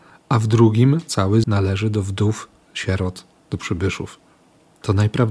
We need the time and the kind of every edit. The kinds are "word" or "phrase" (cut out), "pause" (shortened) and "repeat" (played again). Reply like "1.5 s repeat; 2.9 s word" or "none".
1.4 s word